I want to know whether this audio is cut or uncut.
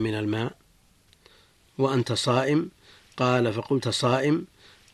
cut